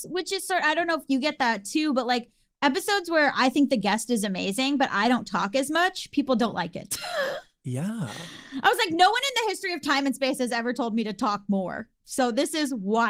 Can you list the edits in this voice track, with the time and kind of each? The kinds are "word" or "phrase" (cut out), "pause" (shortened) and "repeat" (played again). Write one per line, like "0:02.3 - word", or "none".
none